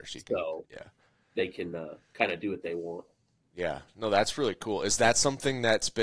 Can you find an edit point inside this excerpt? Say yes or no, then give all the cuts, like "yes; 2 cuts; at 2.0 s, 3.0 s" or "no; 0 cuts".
no; 0 cuts